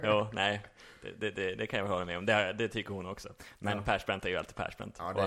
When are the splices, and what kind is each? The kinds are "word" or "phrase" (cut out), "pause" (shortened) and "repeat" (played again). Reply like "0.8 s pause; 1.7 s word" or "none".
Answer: none